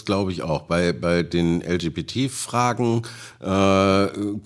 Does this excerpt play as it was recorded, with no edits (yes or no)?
yes